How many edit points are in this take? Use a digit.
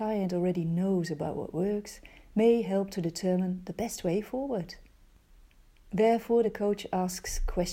0